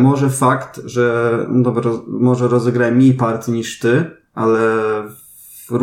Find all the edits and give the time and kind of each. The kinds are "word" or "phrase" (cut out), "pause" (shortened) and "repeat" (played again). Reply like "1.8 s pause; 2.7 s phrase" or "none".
none